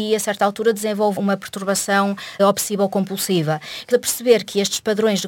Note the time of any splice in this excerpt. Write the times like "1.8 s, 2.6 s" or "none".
1.2 s, 2.4 s, 3.9 s